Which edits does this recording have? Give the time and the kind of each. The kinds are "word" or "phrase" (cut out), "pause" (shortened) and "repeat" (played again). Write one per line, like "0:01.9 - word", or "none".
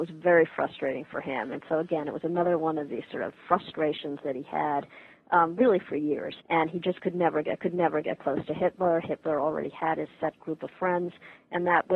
0:06.4 - pause
0:07.6 - repeat